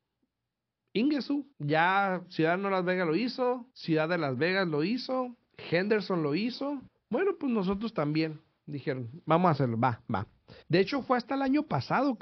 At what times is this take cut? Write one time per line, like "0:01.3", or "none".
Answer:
0:01.5
0:03.7
0:06.9
0:10.6